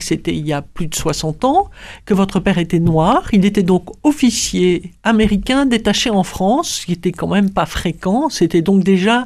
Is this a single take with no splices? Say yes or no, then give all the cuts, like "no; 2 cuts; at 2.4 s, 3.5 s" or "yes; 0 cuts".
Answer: yes; 0 cuts